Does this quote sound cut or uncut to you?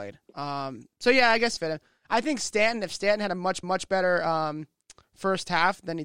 cut